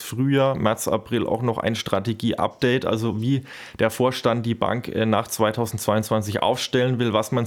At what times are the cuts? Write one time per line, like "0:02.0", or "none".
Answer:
none

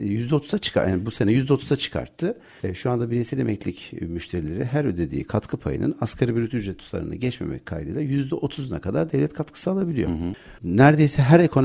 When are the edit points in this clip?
none

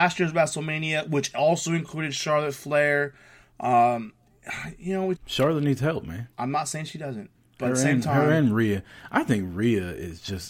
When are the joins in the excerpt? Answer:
0:05.2
0:06.3
0:07.3

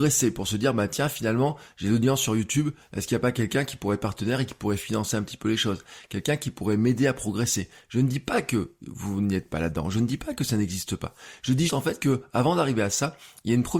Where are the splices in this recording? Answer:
0:11.7

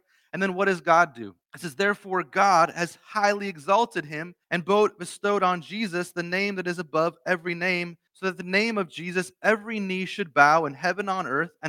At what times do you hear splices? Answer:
0:01.4
0:04.4
0:08.1

